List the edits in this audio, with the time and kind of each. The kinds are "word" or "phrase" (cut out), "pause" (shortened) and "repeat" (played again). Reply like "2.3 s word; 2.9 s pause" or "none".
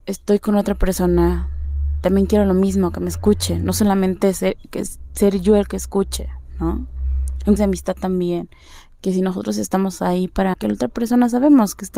7.6 s word; 10.5 s word